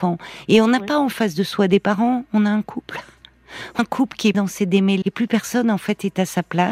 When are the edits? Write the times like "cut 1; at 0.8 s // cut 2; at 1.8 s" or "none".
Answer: cut 1; at 3.8 s // cut 2; at 4.3 s // cut 3; at 5.0 s